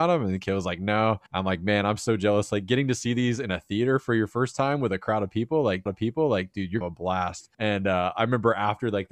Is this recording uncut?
no; 4 cuts; at 1.3 s, 5.9 s, 6.8 s, 7.5 s

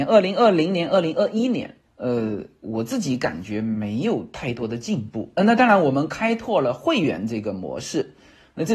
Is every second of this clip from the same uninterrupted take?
no; 1 cut; at 5.4 s

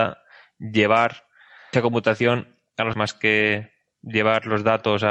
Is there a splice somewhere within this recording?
yes; 2 cuts; at 1.7 s, 2.9 s

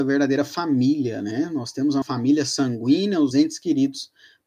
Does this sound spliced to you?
yes; 2 cuts; at 2.0 s, 3.3 s

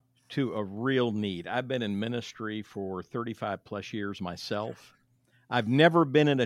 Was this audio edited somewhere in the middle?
no; 0 cuts

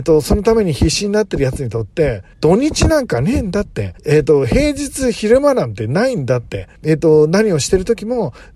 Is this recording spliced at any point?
yes; 3 cuts; at 2.3 s, 4.0 s, 6.8 s

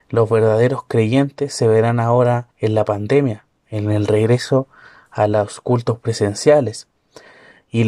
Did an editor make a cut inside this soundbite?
yes; 1 cut; at 2.5 s

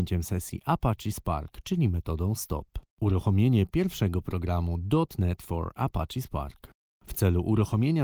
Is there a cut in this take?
no; 0 cuts

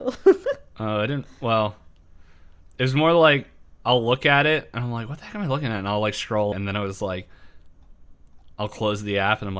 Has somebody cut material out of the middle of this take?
yes; 1 cut; at 6.5 s

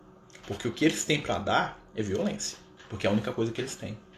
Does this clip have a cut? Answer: no; 0 cuts

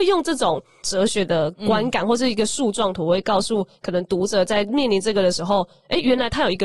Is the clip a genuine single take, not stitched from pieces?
yes; 0 cuts

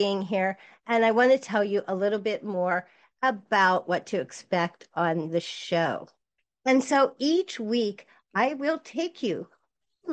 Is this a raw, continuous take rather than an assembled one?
yes; 0 cuts

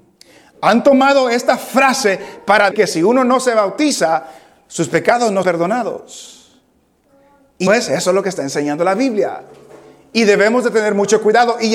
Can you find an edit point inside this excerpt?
yes; 3 cuts; at 2.7 s, 5.4 s, 7.7 s

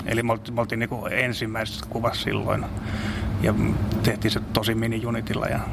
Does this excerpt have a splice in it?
no; 0 cuts

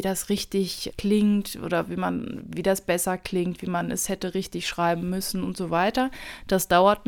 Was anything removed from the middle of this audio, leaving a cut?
yes; 1 cut; at 0.9 s

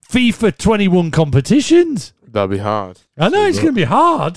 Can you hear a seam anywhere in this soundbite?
yes; 1 cut; at 3.1 s

